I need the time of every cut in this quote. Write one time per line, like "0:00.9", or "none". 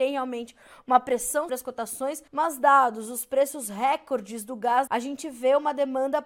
0:01.5
0:02.3
0:04.9